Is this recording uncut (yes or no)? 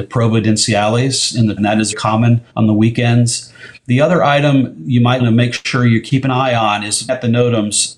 no